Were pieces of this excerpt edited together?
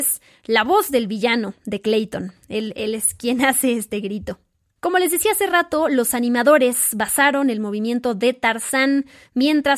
no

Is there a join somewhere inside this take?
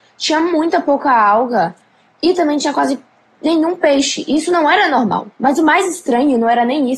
no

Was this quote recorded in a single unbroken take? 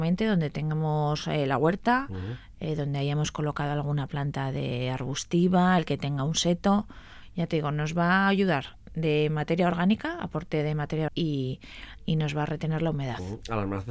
no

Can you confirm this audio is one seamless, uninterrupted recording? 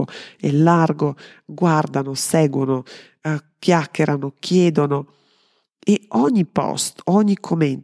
yes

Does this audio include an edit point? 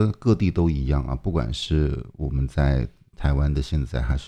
no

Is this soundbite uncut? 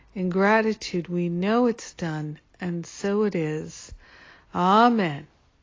yes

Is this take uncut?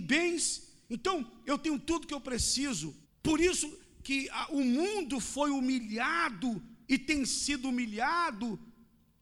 no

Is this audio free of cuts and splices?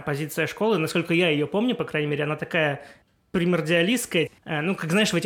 yes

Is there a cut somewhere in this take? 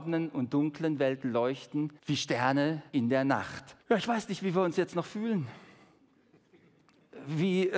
yes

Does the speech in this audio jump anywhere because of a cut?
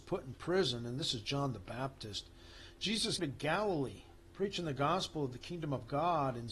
yes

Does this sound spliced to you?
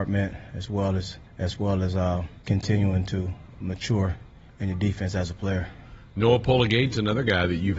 yes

